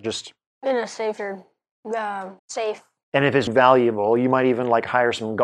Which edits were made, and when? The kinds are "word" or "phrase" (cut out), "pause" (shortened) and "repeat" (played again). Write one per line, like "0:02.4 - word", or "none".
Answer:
0:01.2 - word
0:02.4 - pause
0:03.5 - word